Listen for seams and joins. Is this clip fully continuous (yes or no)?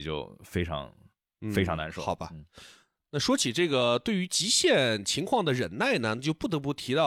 yes